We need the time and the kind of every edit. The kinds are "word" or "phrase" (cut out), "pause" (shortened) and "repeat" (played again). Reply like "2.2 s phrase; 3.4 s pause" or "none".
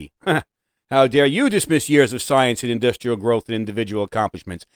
none